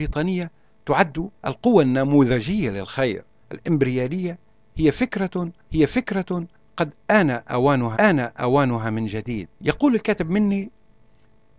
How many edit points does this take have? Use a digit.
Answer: 5